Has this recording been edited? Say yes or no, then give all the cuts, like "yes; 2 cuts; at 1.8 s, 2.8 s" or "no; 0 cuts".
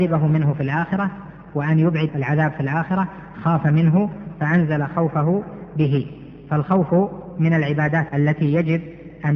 yes; 2 cuts; at 2.1 s, 8.1 s